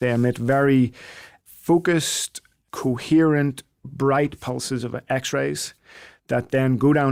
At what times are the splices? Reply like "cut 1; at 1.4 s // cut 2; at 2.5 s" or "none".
none